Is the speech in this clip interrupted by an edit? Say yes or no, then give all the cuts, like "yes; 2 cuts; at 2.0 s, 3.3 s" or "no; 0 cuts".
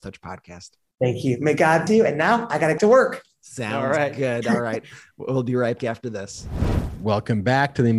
yes; 3 cuts; at 1.9 s, 2.8 s, 5.8 s